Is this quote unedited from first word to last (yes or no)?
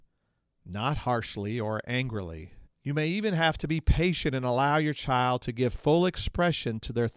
no